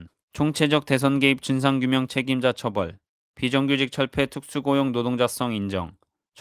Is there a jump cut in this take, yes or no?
no